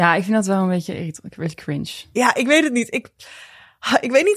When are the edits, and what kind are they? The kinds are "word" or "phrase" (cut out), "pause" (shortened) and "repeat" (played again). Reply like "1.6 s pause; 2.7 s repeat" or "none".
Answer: none